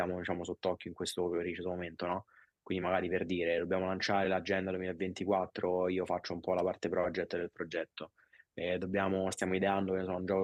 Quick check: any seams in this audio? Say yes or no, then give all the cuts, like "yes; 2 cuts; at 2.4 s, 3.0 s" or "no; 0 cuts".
no; 0 cuts